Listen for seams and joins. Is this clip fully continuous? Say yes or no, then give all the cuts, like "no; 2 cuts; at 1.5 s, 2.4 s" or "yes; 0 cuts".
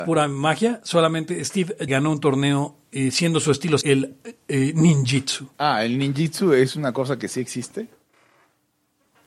no; 3 cuts; at 1.9 s, 3.8 s, 5.5 s